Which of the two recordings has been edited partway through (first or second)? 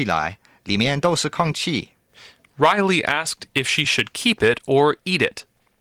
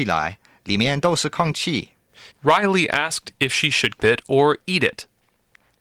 second